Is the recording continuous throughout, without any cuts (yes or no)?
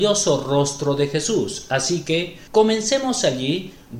no